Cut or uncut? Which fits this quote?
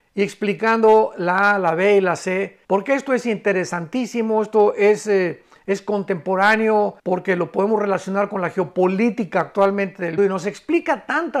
cut